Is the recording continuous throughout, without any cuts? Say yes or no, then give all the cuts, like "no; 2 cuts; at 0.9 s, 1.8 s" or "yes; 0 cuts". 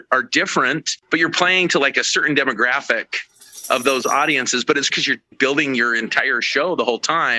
no; 3 cuts; at 1.0 s, 4.9 s, 5.3 s